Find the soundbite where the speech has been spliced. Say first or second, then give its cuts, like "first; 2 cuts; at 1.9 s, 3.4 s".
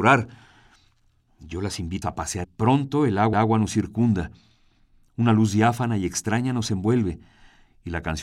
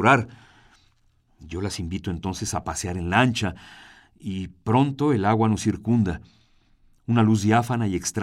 first; 3 cuts; at 2.0 s, 2.4 s, 3.3 s